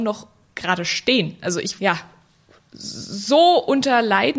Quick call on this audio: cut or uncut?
cut